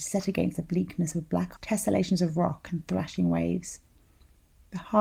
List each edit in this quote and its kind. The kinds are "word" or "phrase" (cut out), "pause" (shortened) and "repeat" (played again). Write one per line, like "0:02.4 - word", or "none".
0:01.6 - word